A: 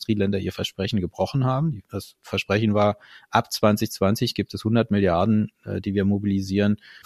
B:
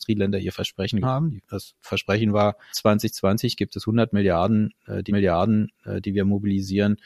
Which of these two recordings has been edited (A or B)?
B